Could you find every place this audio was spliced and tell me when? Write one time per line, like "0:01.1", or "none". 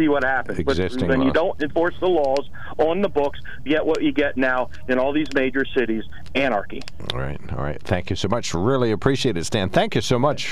0:03.7